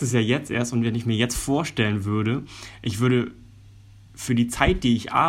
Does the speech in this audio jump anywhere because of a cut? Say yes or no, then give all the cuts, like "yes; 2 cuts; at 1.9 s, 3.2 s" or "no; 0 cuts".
no; 0 cuts